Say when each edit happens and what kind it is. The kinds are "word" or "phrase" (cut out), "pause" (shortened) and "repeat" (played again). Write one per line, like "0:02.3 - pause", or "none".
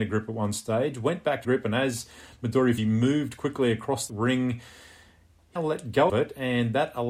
0:01.4 - word
0:02.8 - word
0:04.1 - word
0:05.6 - word
0:06.1 - word